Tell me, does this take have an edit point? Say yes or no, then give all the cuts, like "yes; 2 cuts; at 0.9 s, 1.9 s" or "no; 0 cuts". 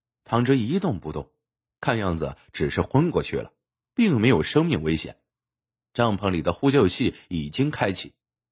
no; 0 cuts